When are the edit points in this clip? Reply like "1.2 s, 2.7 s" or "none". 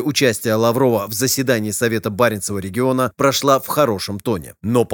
none